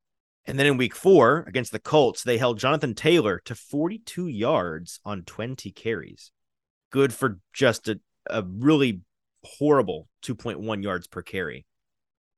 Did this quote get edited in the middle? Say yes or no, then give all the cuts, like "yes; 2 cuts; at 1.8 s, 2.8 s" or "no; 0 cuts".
no; 0 cuts